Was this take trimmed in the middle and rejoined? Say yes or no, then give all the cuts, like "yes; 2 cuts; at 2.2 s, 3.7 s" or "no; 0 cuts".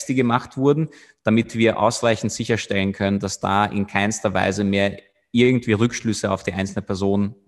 no; 0 cuts